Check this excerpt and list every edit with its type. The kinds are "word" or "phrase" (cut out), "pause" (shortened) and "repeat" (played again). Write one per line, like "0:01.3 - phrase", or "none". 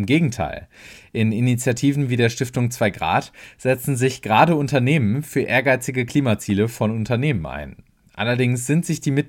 none

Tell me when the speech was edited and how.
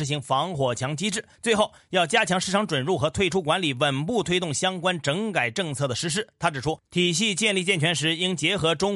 0:01.3 - pause

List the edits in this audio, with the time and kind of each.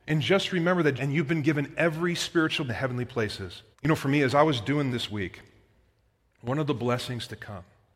0:01.0 - phrase
0:02.7 - phrase
0:03.7 - pause
0:04.9 - word

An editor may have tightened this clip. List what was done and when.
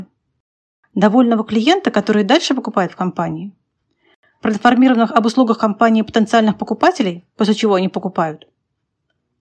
none

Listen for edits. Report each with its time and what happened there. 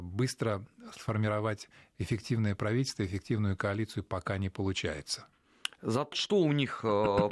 0:06.1 - word

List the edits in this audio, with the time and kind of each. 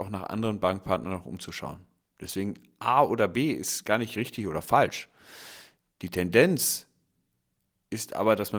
none

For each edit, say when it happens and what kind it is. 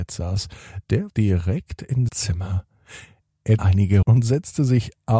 0:01.1 - word
0:02.1 - word
0:03.6 - word
0:04.0 - word

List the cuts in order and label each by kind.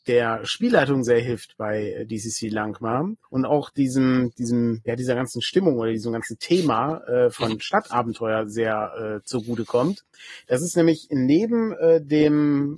0:03.2 - pause

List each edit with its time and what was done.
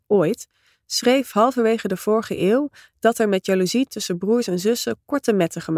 none

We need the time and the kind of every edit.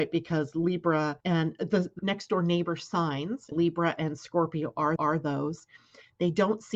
0:01.2 - pause
0:02.0 - word
0:03.5 - word
0:05.0 - repeat

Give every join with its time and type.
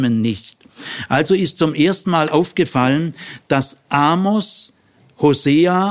none

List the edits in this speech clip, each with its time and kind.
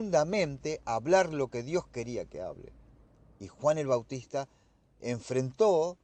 none

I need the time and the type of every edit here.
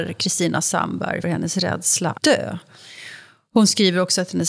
0:01.2 - word
0:02.2 - word

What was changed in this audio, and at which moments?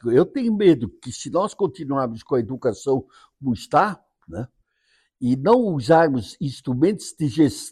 none

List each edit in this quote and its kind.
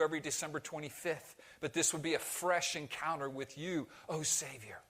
none

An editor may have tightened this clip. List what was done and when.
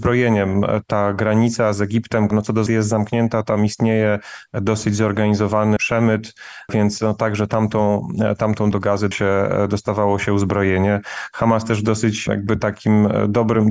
0:02.3 - word
0:02.7 - word
0:05.8 - word
0:08.7 - word
0:09.1 - word

